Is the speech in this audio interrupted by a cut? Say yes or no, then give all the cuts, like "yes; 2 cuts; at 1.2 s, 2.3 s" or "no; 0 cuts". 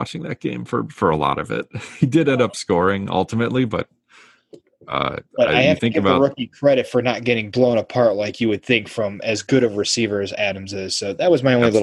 no; 0 cuts